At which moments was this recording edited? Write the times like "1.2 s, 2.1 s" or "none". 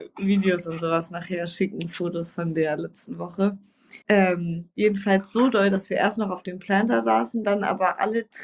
4.0 s